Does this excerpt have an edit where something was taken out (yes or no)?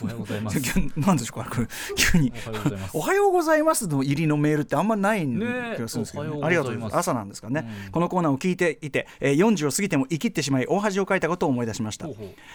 no